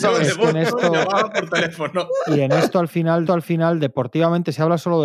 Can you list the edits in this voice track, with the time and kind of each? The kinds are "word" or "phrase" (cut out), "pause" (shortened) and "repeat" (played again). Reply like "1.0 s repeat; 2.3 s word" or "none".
3.3 s repeat